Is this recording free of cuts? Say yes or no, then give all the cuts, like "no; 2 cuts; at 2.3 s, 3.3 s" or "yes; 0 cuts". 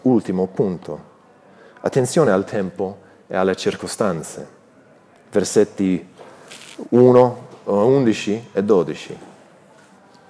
yes; 0 cuts